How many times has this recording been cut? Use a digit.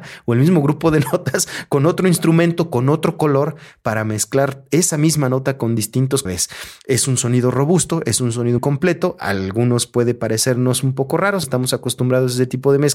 3